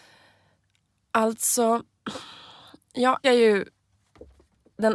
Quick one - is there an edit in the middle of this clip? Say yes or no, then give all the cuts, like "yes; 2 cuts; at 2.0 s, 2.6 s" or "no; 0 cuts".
yes; 1 cut; at 3.2 s